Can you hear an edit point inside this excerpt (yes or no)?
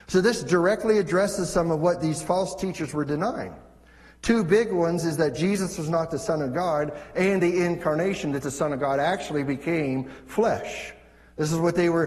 no